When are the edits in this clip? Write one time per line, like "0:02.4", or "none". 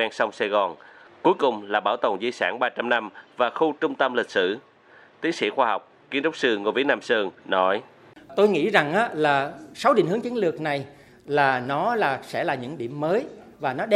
0:07.4